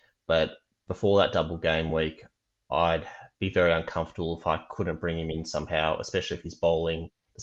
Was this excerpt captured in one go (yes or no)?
yes